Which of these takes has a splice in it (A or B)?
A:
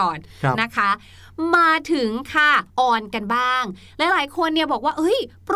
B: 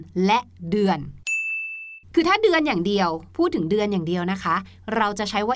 A